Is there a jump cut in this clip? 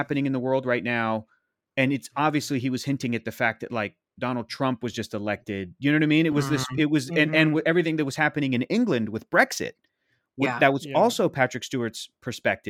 no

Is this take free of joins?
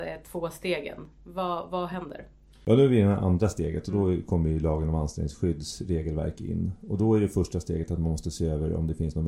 yes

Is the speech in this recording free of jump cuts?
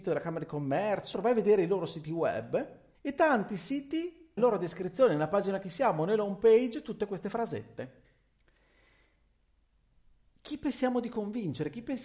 no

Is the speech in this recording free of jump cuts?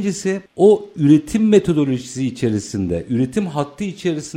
yes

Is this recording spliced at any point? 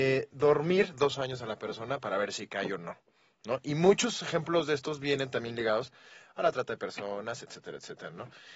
no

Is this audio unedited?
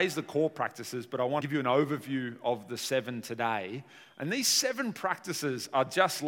no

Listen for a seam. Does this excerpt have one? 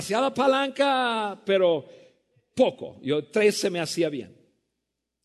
no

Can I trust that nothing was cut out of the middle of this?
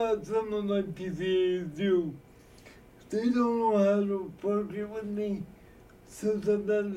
yes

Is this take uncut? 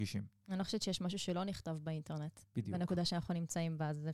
yes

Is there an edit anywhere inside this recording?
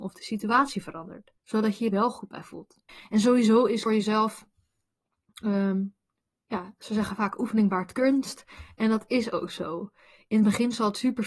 yes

